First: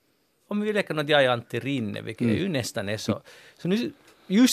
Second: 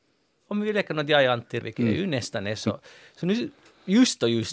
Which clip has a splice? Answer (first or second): second